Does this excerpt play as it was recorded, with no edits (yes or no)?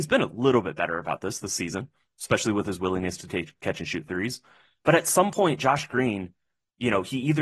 yes